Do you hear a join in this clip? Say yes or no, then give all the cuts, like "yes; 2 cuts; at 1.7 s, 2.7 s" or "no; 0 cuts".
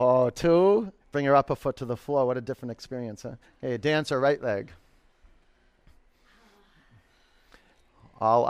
yes; 2 cuts; at 1.0 s, 3.4 s